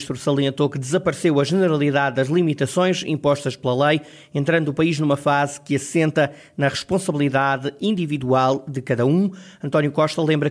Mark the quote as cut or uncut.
uncut